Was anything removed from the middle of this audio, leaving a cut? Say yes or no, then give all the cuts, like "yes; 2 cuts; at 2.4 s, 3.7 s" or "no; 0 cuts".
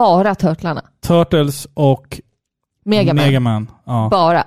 no; 0 cuts